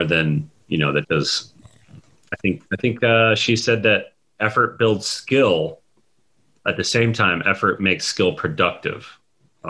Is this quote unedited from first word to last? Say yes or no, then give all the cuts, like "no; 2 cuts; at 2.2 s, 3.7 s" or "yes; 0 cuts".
no; 2 cuts; at 1.0 s, 2.7 s